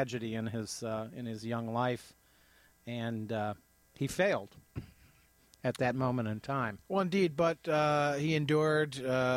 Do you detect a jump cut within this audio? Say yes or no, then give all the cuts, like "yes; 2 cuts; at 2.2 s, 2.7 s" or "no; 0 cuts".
no; 0 cuts